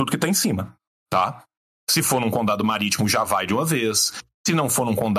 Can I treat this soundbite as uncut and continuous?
yes; 0 cuts

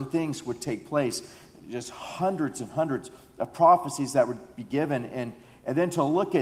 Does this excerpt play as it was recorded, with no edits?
yes; 0 cuts

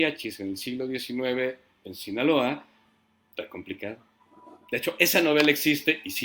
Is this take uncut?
yes; 0 cuts

